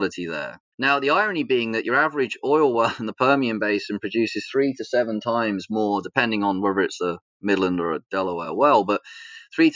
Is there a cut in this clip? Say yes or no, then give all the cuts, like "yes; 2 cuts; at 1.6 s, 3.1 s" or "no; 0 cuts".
no; 0 cuts